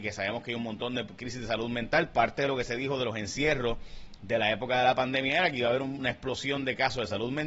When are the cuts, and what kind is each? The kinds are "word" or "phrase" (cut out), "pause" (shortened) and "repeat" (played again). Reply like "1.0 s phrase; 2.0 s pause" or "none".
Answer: none